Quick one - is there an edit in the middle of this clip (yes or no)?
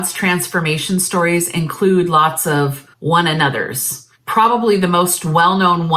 yes